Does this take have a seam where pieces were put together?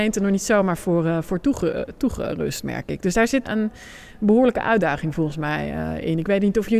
yes; 1 cut; at 3.4 s

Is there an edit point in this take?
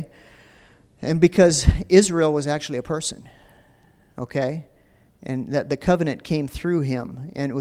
no; 0 cuts

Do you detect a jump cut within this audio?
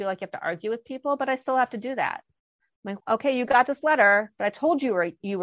yes; 1 cut; at 3.0 s

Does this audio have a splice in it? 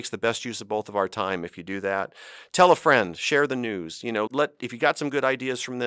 yes; 1 cut; at 4.3 s

